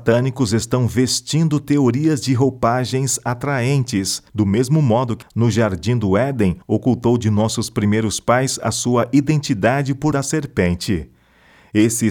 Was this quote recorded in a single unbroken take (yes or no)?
no